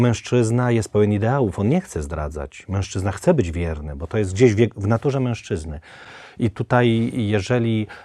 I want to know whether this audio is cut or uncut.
uncut